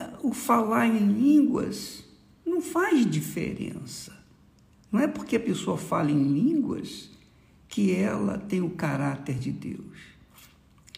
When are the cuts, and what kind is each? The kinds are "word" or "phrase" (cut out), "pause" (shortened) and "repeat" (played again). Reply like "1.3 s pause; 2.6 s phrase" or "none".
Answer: none